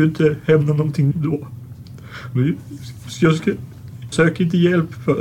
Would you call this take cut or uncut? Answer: cut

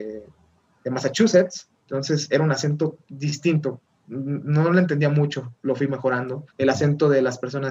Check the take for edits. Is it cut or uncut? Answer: cut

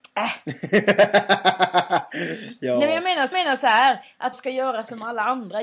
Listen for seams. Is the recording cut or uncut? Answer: cut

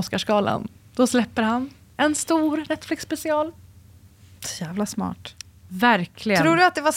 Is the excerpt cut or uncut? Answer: uncut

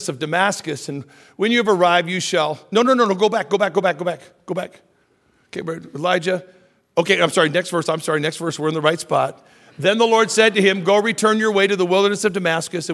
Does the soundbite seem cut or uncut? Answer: uncut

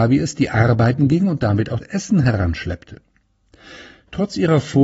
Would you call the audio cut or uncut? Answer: cut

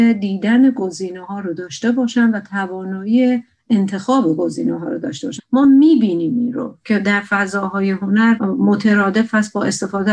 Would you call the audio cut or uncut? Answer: uncut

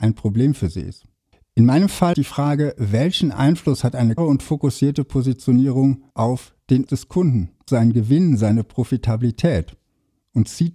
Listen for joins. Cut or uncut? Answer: cut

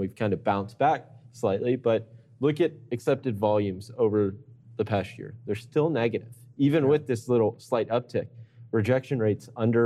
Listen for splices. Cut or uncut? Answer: uncut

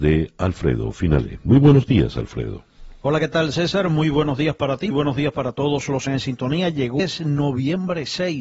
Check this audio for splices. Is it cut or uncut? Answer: cut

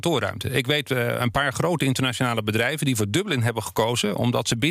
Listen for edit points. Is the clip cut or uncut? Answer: uncut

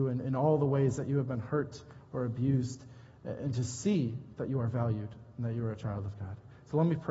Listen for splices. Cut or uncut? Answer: uncut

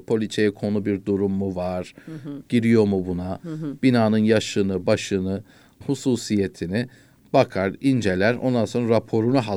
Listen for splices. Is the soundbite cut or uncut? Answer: cut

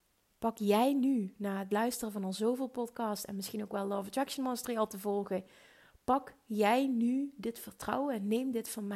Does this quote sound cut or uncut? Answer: uncut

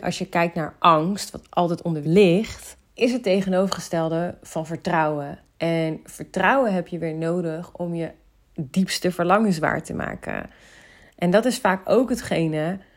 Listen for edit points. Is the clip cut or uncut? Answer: cut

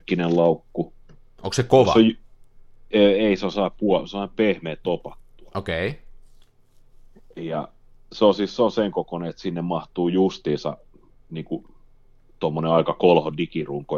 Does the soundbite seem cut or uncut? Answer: uncut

